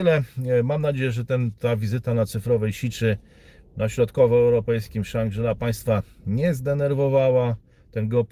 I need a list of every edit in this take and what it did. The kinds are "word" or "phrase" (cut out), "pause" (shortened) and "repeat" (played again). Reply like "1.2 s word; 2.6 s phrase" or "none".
none